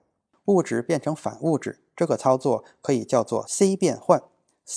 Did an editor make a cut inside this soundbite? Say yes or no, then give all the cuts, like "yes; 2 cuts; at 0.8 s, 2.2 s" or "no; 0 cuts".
no; 0 cuts